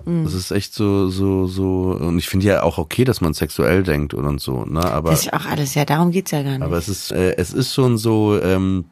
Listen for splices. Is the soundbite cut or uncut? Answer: cut